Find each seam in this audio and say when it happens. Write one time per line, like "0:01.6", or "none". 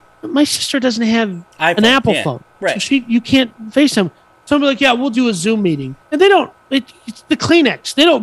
0:01.5
0:02.5
0:05.1
0:06.0